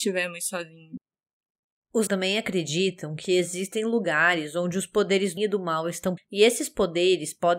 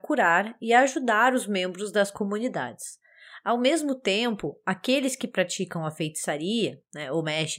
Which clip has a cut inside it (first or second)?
first